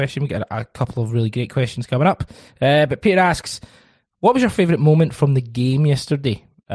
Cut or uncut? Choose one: uncut